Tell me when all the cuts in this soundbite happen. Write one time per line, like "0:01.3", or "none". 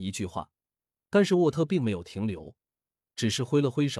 none